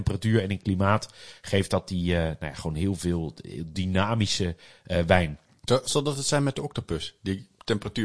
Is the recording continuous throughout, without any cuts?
no; 1 cut; at 3.7 s

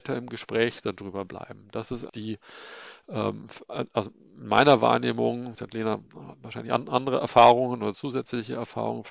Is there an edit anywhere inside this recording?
yes; 3 cuts; at 2.1 s, 5.6 s, 6.1 s

